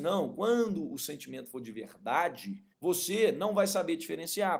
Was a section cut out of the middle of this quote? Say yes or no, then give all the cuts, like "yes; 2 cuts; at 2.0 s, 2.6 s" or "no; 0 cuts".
yes; 1 cut; at 2.7 s